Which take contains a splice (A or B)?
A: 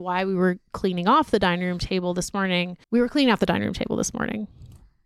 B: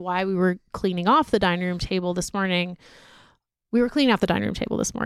A